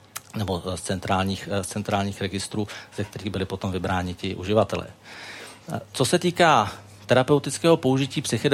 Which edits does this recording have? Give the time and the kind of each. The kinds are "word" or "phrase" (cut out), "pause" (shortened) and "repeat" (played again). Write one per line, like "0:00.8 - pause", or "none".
none